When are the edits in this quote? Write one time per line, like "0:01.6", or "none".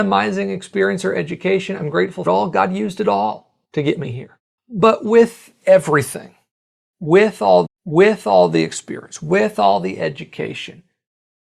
0:02.3
0:03.6
0:04.5
0:07.6